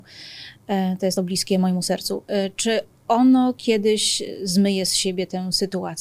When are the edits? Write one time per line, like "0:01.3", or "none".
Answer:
0:01.2

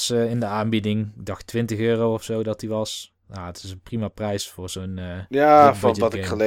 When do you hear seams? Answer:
0:03.2

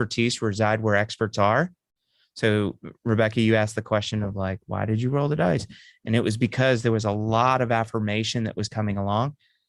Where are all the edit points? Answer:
none

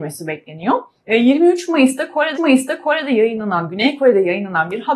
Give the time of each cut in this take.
0:01.0
0:02.4

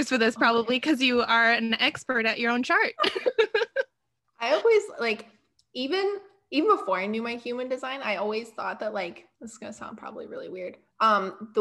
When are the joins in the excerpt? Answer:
0:09.3

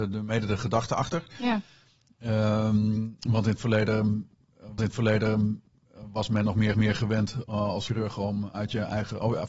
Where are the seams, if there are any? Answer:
0:04.8
0:06.7
0:07.9

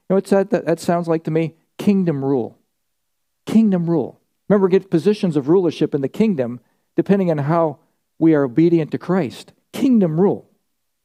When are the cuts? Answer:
none

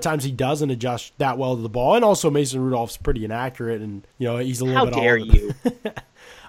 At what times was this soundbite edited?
0:04.1

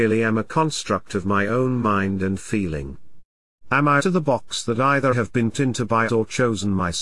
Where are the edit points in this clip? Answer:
0:04.0
0:05.1
0:05.5
0:06.1

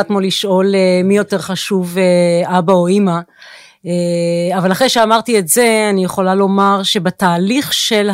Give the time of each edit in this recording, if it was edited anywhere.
none

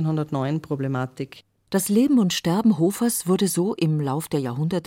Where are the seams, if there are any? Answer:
none

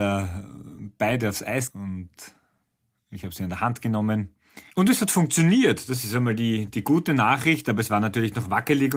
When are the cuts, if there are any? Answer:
0:01.7
0:04.7

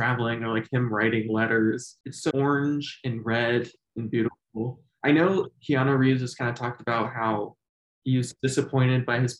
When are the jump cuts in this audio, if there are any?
0:02.3

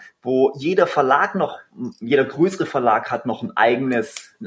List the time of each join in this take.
none

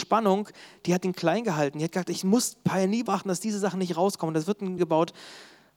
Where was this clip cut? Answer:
0:03.1
0:04.8

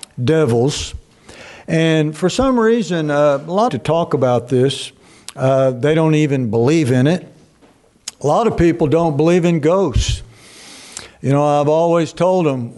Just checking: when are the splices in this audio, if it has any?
0:03.7

